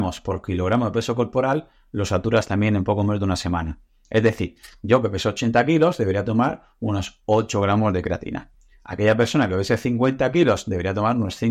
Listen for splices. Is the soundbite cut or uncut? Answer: uncut